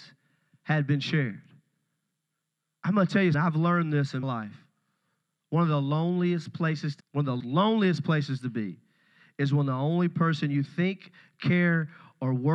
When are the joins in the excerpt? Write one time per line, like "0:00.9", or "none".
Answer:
0:03.3
0:04.2
0:07.0
0:07.4

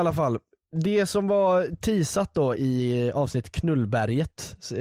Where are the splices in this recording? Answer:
0:02.5

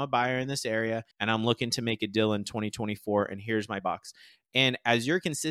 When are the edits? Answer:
0:01.1
0:03.8

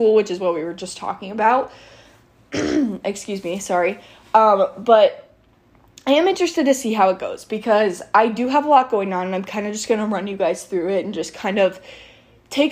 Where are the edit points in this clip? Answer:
none

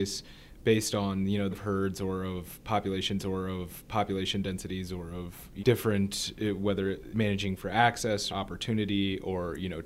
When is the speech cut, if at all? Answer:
0:01.5
0:03.2
0:05.6
0:07.1
0:08.3

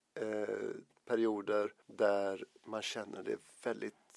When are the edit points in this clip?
0:01.8

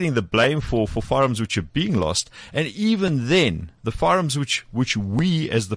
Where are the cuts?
none

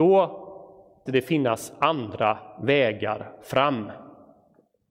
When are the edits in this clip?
0:01.1

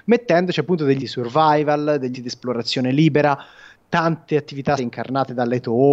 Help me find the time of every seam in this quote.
0:01.0
0:02.1
0:04.8

